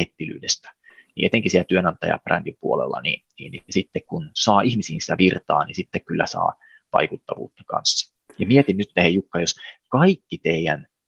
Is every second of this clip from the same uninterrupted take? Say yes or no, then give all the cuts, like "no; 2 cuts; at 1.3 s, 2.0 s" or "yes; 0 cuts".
yes; 0 cuts